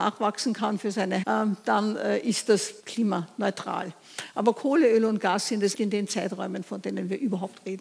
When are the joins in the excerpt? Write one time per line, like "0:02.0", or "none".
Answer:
0:01.2
0:02.8
0:05.7